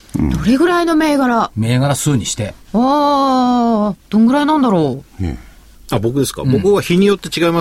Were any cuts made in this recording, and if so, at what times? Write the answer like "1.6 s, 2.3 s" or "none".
5.1 s, 5.7 s